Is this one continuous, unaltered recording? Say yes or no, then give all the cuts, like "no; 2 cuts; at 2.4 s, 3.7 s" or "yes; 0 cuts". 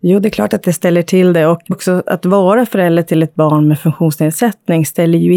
no; 1 cut; at 1.7 s